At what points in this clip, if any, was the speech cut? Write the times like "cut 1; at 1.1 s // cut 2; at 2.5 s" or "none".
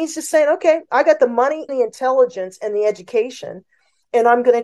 cut 1; at 1.7 s